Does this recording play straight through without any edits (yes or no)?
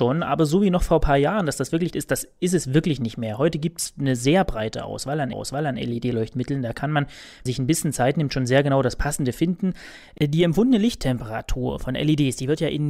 no